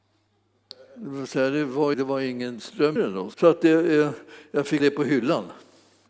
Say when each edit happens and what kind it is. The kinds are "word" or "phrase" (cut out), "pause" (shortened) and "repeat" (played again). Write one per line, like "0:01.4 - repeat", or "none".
0:01.9 - word
0:03.0 - word
0:03.3 - word
0:04.8 - word